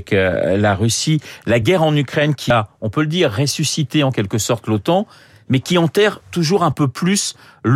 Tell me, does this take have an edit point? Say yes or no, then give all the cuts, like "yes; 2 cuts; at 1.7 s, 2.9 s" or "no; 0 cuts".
no; 0 cuts